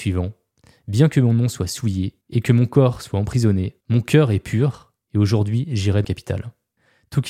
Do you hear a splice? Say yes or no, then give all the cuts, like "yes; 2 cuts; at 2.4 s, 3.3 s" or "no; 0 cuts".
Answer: yes; 3 cuts; at 2.2 s, 3.8 s, 6.0 s